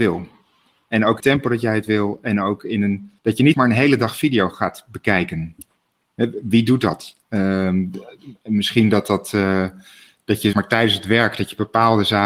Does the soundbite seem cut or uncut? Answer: cut